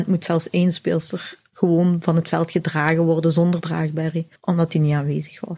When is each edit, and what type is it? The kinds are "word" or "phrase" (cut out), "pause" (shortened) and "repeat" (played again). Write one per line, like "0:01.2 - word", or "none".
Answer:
0:04.4 - pause